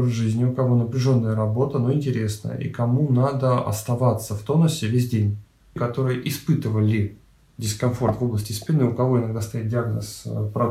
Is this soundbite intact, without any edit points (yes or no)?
yes